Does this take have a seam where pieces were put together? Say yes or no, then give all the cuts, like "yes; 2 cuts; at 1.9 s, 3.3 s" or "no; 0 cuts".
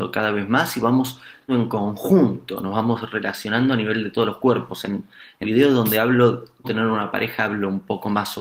yes; 3 cuts; at 1.5 s, 5.4 s, 6.6 s